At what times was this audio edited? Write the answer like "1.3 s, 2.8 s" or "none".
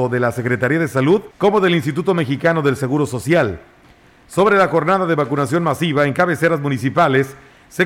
1.3 s